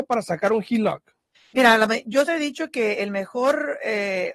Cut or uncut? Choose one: cut